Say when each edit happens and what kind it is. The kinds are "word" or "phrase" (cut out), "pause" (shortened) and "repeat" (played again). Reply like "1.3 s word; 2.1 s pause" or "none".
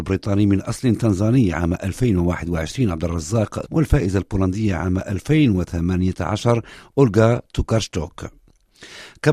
3.6 s word